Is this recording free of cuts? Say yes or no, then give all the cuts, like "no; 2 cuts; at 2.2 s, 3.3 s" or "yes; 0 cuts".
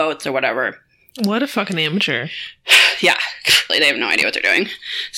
no; 1 cut; at 3.7 s